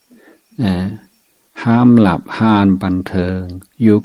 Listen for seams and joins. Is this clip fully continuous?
yes; 0 cuts

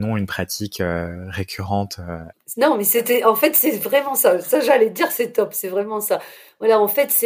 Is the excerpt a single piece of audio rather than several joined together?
yes; 0 cuts

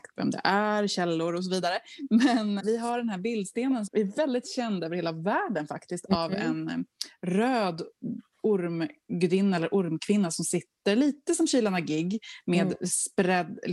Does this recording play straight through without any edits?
no; 2 cuts; at 2.6 s, 3.9 s

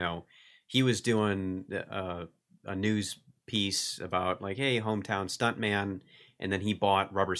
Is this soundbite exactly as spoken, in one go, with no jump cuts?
yes; 0 cuts

